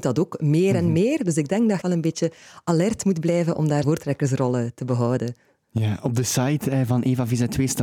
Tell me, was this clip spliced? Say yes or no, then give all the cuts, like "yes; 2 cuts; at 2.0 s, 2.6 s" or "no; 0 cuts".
yes; 2 cuts; at 1.8 s, 3.8 s